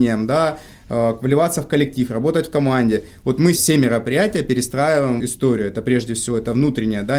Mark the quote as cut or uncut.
cut